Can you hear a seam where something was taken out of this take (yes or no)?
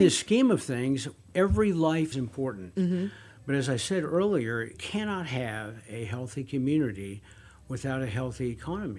yes